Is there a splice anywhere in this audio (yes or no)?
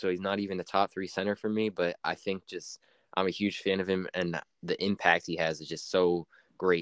no